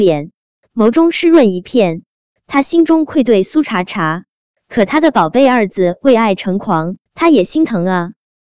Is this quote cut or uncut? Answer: cut